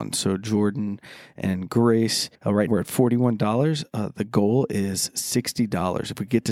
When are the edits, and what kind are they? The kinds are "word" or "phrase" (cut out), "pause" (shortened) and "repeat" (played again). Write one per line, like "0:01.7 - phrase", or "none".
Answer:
0:02.3 - pause
0:02.7 - word